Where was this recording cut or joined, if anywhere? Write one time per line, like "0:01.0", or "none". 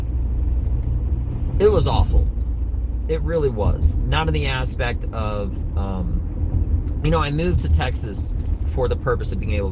none